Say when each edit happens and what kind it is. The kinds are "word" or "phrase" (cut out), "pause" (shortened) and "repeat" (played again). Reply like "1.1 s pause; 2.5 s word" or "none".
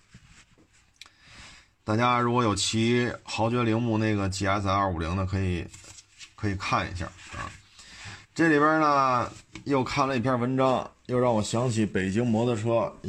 8.2 s pause